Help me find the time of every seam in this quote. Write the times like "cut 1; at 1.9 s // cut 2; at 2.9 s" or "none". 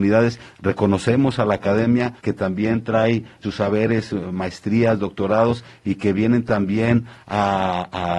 cut 1; at 2.2 s // cut 2; at 3.4 s